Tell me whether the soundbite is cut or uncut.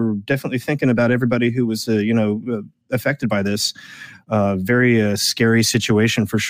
uncut